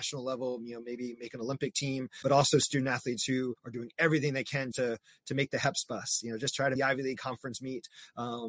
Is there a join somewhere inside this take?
yes; 4 cuts; at 2.2 s, 3.6 s, 4.7 s, 6.8 s

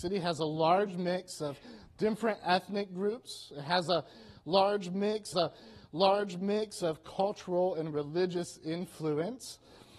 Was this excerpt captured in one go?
no; 1 cut; at 5.3 s

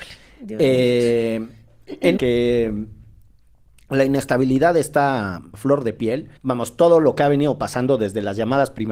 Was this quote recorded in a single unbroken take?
no; 3 cuts; at 2.2 s, 5.5 s, 6.4 s

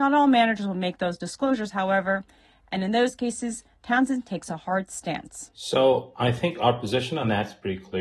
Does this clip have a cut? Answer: no; 0 cuts

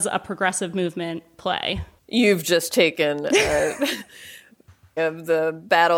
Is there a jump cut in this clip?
yes; 2 cuts; at 2.0 s, 5.0 s

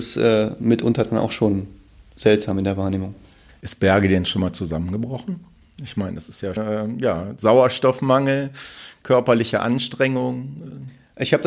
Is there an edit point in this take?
yes; 1 cut; at 6.6 s

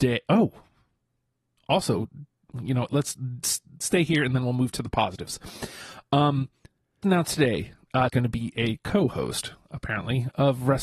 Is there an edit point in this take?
yes; 2 cuts; at 7.0 s, 8.1 s

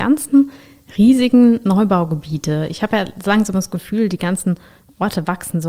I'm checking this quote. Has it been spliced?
no; 0 cuts

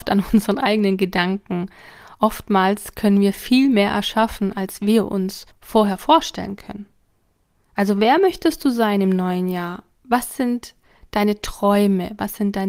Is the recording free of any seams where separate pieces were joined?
yes; 0 cuts

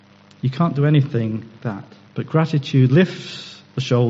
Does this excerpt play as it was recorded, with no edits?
no; 2 cuts; at 1.6 s, 2.1 s

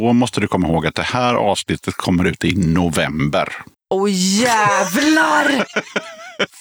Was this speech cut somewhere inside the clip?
no; 0 cuts

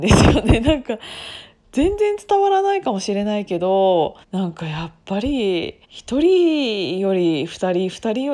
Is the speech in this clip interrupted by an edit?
yes; 2 cuts; at 4.2 s, 5.8 s

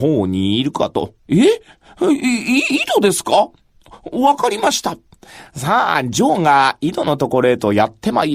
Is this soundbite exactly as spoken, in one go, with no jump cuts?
no; 1 cut; at 1.2 s

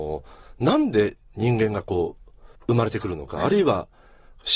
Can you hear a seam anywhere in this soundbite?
yes; 1 cut; at 2.6 s

